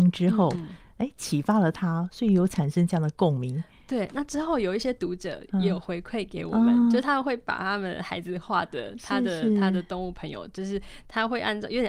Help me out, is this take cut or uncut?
uncut